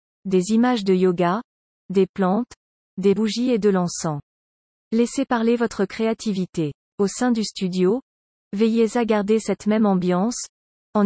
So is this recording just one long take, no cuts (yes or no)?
no